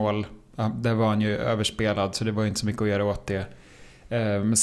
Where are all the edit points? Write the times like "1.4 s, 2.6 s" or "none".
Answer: none